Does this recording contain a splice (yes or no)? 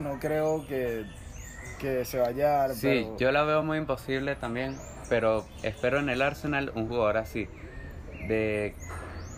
no